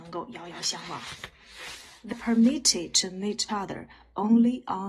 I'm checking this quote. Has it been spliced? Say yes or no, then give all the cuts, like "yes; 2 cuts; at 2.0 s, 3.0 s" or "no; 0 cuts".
yes; 2 cuts; at 2.1 s, 3.5 s